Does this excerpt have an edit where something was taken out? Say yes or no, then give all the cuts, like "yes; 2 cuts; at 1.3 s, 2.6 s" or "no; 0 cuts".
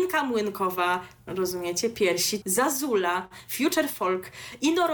yes; 2 cuts; at 1.3 s, 2.4 s